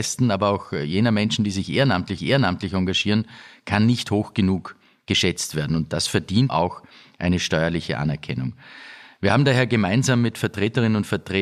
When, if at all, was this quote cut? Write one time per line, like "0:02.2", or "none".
0:02.2
0:06.5